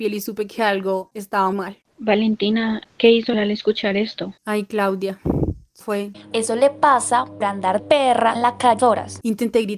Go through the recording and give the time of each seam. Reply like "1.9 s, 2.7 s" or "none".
1.5 s, 3.3 s, 5.8 s, 6.3 s, 7.4 s, 7.8 s, 8.4 s, 8.8 s